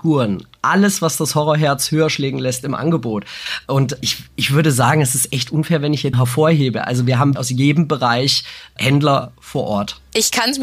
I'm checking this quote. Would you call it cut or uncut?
cut